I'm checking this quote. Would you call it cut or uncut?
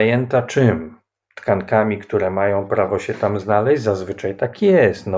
uncut